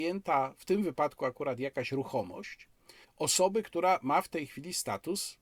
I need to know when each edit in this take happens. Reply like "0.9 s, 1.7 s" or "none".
3.0 s